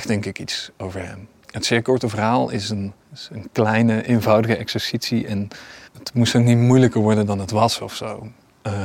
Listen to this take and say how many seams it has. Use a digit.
3